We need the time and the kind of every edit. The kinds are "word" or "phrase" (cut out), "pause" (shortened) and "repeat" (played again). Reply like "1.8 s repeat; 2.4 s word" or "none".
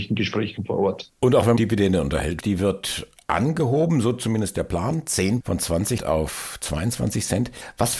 1.1 s pause; 1.6 s phrase; 2.4 s word; 5.4 s word; 6.0 s word